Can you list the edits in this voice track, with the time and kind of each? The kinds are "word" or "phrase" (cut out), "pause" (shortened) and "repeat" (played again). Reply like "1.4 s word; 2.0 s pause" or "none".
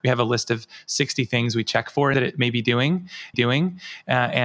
2.1 s phrase; 3.3 s repeat